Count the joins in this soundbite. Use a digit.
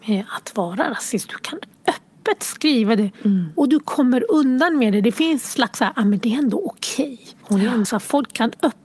4